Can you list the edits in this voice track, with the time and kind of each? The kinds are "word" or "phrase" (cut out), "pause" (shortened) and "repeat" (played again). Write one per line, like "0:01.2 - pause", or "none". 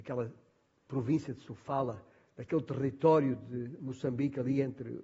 0:02.2 - pause